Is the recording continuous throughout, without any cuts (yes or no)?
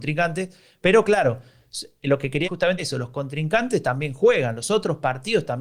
no